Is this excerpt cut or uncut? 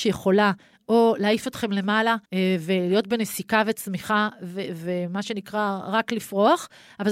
cut